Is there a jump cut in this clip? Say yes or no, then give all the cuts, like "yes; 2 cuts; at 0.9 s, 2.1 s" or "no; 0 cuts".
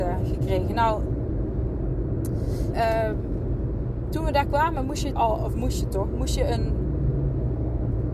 yes; 2 cuts; at 2.7 s, 5.2 s